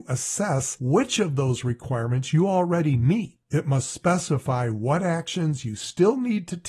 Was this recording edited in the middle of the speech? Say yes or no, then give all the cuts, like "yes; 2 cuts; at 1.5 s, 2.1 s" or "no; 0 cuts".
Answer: yes; 1 cut; at 3.4 s